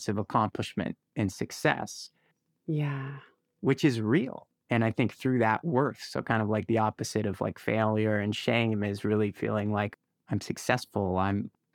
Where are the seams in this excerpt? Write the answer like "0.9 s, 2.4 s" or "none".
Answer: 10.1 s

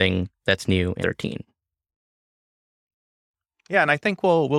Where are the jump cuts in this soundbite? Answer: 1.0 s

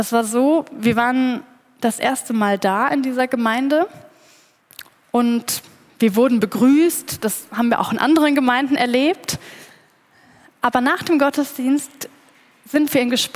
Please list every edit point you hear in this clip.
none

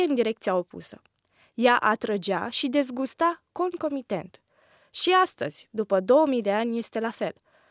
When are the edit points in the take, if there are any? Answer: none

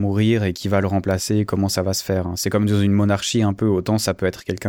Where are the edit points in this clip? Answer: none

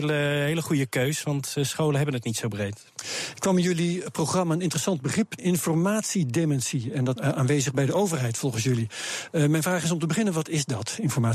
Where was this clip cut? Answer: 5.4 s, 7.2 s

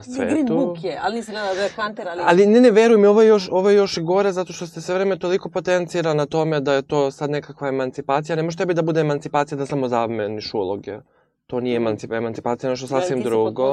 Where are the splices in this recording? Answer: none

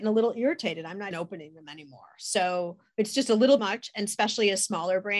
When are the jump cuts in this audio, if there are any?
1.1 s, 3.6 s

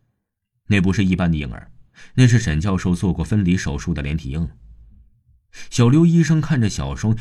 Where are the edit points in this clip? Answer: none

